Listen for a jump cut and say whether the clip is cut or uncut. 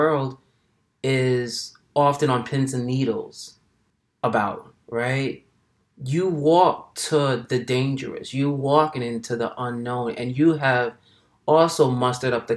cut